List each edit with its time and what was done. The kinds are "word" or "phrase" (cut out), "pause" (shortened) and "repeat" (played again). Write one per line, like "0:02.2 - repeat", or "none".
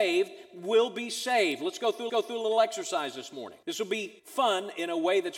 0:02.1 - repeat
0:03.6 - pause
0:04.2 - pause